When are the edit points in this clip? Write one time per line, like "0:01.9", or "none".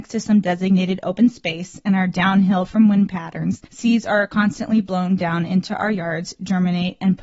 0:03.6